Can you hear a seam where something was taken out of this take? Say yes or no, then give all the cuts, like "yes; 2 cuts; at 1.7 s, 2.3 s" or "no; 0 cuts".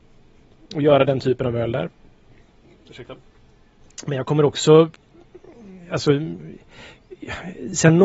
no; 0 cuts